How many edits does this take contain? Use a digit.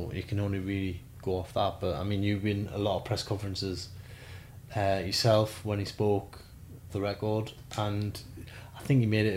1